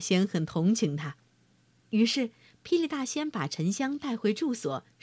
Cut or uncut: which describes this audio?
uncut